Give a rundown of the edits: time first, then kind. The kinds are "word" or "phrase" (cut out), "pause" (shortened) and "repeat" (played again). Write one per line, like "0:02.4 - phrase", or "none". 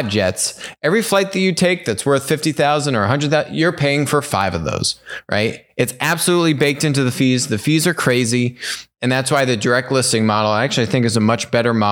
none

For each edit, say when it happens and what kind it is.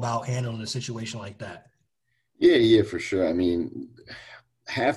none

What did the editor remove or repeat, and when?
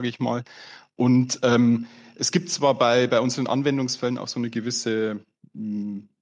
none

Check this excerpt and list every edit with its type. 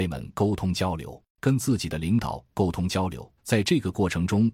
0:01.3 - pause
0:03.4 - pause

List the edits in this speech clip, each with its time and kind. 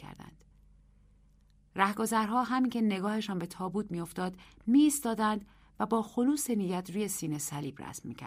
none

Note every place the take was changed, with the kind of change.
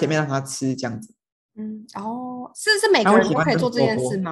none

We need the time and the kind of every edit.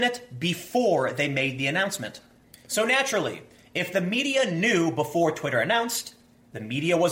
none

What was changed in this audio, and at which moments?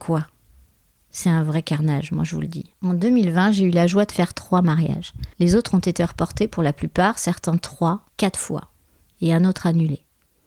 0:02.7 - pause
0:05.3 - pause
0:08.1 - pause

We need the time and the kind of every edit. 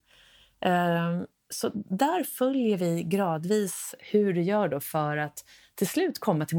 none

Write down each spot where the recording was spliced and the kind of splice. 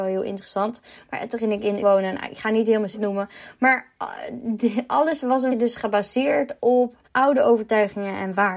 0:01.8 - word
0:02.9 - word
0:05.5 - word
0:07.0 - pause

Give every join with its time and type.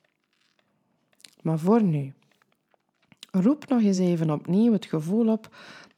none

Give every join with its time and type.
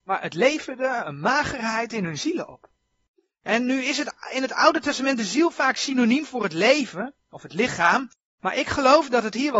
none

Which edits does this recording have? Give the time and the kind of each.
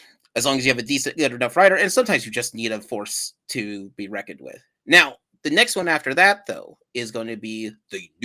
none

